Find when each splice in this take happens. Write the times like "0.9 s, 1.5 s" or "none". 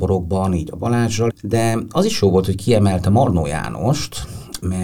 1.3 s